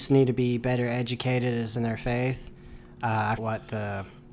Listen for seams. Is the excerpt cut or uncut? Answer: cut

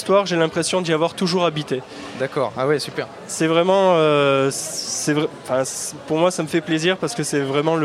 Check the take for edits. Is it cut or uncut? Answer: uncut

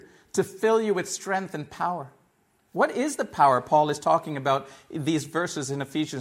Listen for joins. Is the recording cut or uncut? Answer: uncut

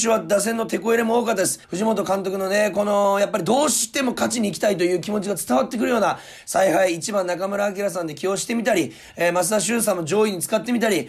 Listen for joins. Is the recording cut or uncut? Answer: cut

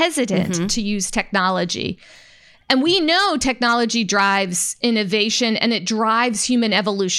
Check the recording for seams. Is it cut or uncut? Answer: uncut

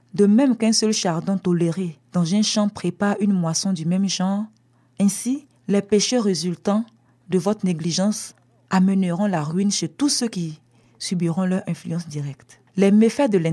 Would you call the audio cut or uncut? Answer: cut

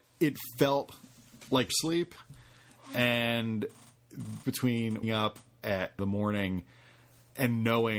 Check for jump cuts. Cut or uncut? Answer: cut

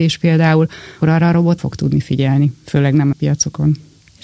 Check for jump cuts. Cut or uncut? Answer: cut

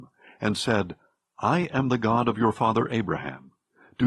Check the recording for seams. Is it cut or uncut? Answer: uncut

